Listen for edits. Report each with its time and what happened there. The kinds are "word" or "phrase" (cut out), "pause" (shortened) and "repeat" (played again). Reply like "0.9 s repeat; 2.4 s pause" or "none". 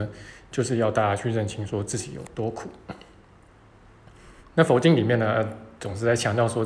4.4 s pause